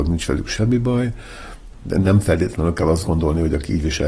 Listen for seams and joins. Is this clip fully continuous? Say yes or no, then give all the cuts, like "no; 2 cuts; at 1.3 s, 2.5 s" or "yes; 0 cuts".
yes; 0 cuts